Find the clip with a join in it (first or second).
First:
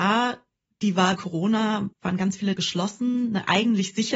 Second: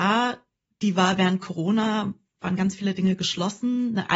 first